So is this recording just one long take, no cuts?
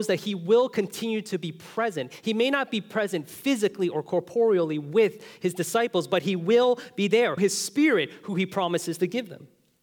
no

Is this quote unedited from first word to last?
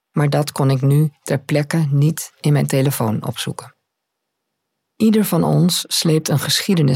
yes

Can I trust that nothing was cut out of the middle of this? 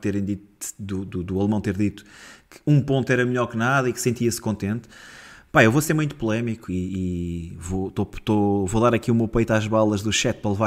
yes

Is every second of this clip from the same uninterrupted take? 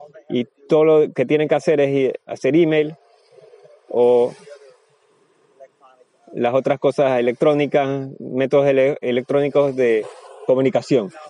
yes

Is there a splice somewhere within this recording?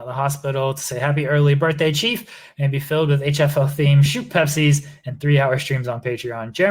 no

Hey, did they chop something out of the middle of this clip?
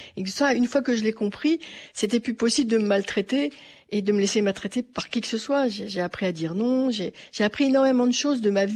no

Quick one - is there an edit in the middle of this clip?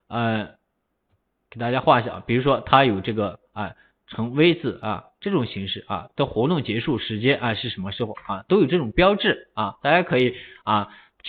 no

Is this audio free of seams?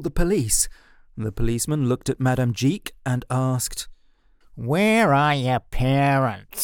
yes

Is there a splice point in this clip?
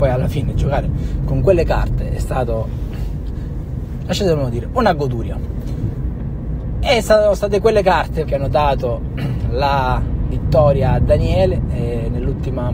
yes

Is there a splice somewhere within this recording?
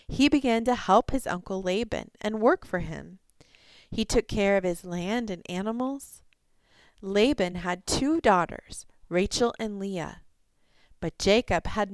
no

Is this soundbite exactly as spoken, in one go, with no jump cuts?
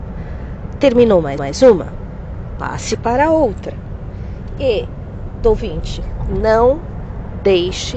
no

